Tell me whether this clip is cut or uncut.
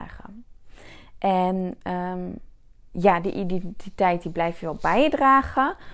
uncut